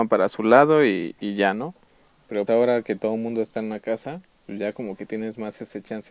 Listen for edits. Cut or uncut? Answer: cut